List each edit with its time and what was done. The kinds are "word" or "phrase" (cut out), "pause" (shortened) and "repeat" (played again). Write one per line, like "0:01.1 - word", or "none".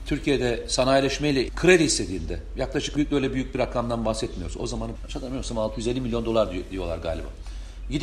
0:01.5 - word
0:03.0 - word
0:05.0 - word